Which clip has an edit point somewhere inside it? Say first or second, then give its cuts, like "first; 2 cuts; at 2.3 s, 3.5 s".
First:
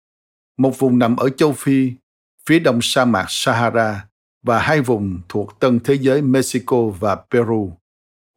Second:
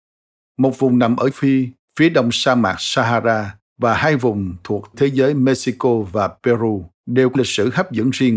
second; 6 cuts; at 1.3 s, 1.8 s, 3.7 s, 4.9 s, 6.9 s, 7.3 s